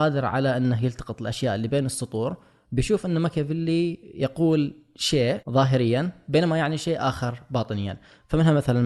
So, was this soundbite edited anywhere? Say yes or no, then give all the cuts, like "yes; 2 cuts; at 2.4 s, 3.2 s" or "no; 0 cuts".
no; 0 cuts